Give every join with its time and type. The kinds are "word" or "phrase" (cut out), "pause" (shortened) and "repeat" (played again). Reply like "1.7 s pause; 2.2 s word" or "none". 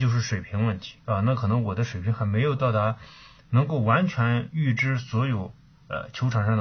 none

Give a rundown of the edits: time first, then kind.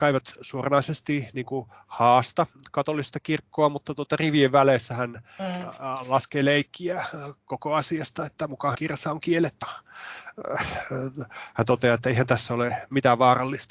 8.7 s word; 9.6 s word

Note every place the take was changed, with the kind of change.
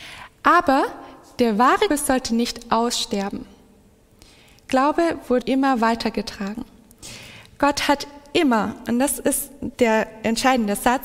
1.9 s word; 5.4 s word; 9.7 s pause

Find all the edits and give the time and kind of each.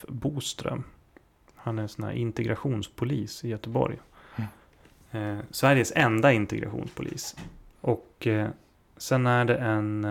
none

